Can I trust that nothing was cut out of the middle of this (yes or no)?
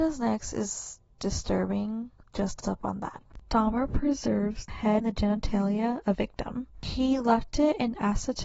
no